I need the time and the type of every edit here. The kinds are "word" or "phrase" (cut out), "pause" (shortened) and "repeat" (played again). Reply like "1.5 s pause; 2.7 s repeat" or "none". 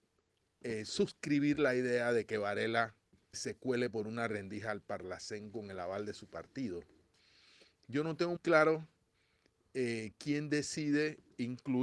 3.3 s word; 8.4 s word